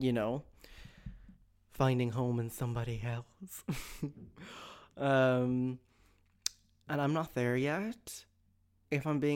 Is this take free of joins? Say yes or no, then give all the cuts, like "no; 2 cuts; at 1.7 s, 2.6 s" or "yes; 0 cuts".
yes; 0 cuts